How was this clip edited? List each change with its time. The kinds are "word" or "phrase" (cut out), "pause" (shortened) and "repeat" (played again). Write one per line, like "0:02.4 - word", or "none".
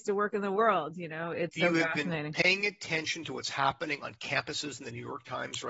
0:01.5 - phrase